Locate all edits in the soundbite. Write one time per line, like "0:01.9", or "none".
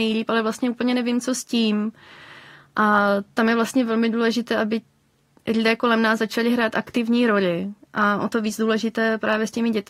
none